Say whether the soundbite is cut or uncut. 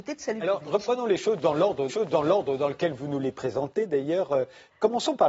cut